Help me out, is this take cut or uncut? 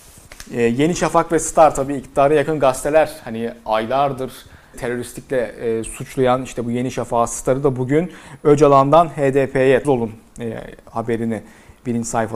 cut